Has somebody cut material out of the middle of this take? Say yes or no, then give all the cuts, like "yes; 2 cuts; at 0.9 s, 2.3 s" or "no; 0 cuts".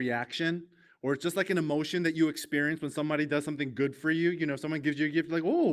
no; 0 cuts